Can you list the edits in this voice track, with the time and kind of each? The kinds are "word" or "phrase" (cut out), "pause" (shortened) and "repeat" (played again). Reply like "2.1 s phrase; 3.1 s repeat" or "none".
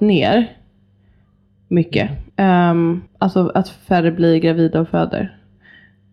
2.3 s pause; 3.1 s pause